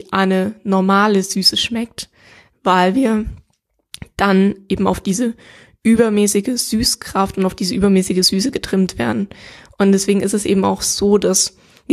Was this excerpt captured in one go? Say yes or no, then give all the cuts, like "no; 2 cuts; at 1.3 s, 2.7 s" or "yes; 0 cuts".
yes; 0 cuts